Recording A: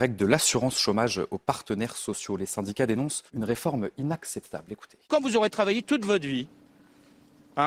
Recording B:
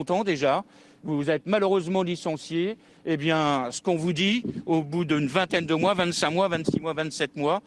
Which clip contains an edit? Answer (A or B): A